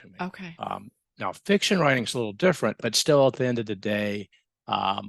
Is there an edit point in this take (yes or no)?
yes